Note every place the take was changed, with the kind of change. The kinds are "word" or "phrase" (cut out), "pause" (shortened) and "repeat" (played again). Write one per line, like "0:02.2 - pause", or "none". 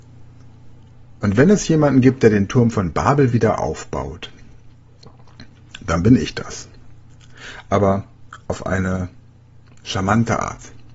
0:01.2 - pause